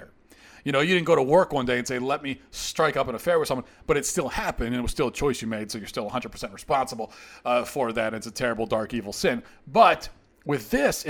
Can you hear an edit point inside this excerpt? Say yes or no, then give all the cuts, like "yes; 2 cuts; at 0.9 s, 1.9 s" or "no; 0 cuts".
no; 0 cuts